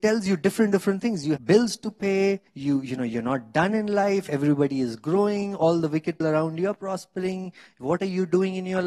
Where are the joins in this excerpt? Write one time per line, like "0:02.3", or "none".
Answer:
0:01.4
0:02.5
0:06.2